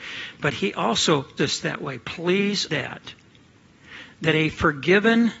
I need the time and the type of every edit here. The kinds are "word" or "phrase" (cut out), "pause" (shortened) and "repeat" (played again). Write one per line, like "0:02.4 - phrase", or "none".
0:01.4 - word
0:02.7 - word

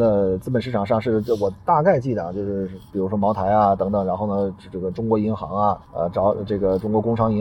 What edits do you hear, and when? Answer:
0:05.8 - pause

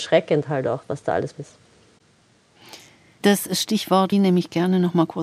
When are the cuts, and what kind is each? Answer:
0:01.3 - word
0:04.1 - word

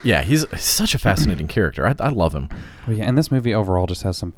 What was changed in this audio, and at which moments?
none

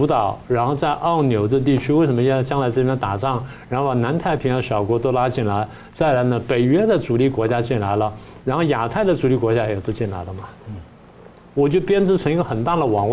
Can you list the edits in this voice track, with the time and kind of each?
0:10.6 - pause

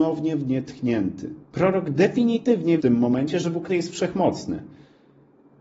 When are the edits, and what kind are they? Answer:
0:01.4 - pause
0:02.8 - phrase
0:03.7 - word

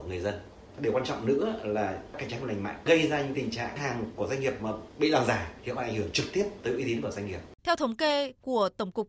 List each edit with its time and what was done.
0:07.6 - pause

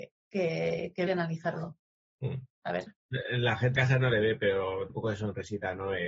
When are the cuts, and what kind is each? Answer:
0:01.1 - word
0:03.8 - word
0:04.9 - word

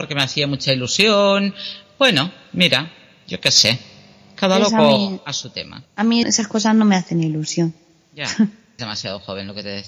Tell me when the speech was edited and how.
0:05.9 - pause
0:06.2 - word
0:08.8 - phrase

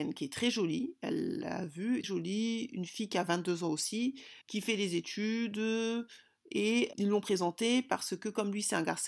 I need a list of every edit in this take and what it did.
0:02.0 - word
0:04.4 - pause
0:06.9 - word

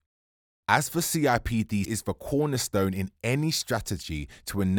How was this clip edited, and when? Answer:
0:01.8 - phrase

